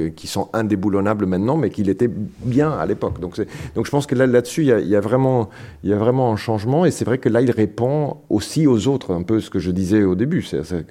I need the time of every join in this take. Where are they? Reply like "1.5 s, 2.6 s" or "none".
none